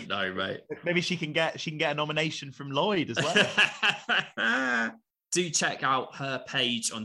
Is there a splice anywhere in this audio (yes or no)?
no